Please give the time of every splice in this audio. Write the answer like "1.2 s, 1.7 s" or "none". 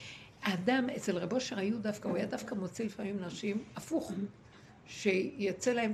none